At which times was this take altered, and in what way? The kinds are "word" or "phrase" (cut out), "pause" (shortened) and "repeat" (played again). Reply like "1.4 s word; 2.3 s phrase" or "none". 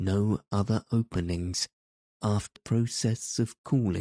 2.6 s word